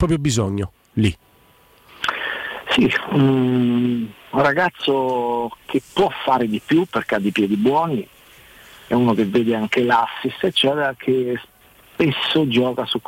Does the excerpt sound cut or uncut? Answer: uncut